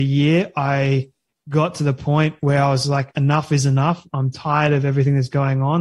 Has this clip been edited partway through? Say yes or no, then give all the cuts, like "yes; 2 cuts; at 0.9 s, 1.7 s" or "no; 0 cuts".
no; 0 cuts